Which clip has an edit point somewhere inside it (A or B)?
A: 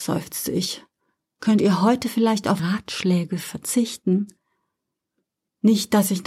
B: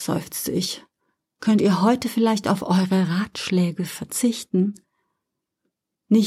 A